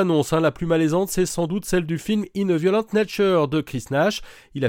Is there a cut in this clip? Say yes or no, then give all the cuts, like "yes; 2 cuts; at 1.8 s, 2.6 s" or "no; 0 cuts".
no; 0 cuts